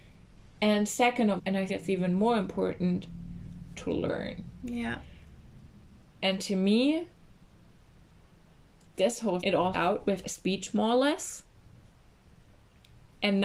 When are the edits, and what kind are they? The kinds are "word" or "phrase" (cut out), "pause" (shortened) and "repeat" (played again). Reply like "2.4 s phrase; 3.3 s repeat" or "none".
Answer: 1.4 s word; 1.7 s word; 3.7 s word; 8.9 s word; 9.4 s word; 9.7 s word; 10.2 s word

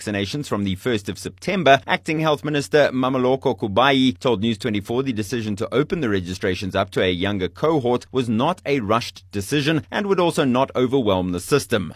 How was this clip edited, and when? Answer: none

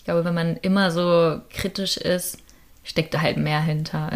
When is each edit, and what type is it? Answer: none

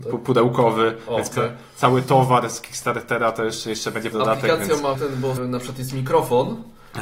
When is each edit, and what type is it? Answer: 1.3 s word; 4.1 s word; 4.9 s word; 5.4 s word

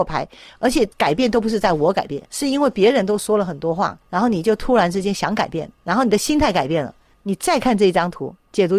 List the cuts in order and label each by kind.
0.9 s pause; 2.3 s pause; 4.0 s pause; 5.8 s pause

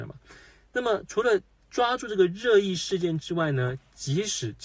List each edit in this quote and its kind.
none

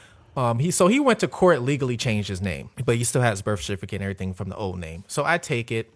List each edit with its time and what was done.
2.7 s pause

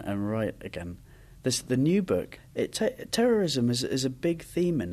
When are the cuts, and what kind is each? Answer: none

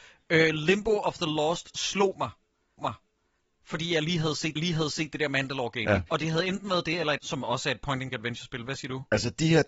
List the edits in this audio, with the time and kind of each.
2.8 s repeat; 4.6 s repeat; 6.1 s pause; 7.2 s word; 8.1 s word

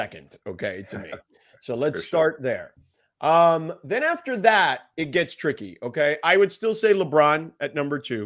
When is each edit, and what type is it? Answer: none

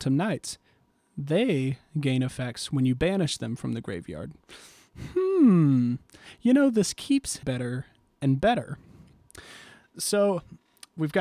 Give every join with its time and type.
7.4 s word

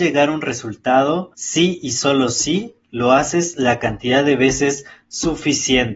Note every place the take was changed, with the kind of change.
1.3 s pause

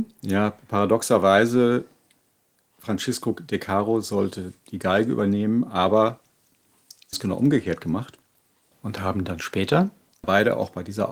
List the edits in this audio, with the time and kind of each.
7.1 s word

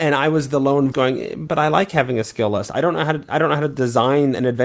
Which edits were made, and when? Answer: 0.9 s word; 1.5 s word

